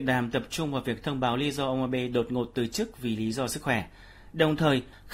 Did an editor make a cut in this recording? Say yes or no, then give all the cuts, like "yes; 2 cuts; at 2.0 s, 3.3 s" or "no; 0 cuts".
no; 0 cuts